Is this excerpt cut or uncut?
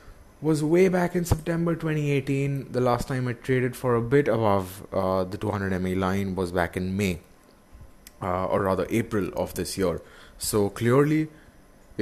uncut